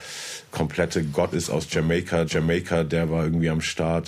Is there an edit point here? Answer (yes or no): yes